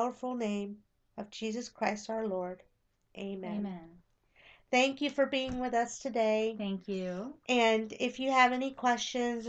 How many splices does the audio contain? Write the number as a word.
zero